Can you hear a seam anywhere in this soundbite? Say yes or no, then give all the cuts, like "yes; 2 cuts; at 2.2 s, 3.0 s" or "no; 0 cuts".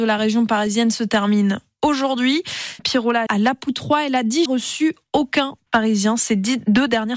yes; 4 cuts; at 2.8 s, 3.3 s, 4.5 s, 5.7 s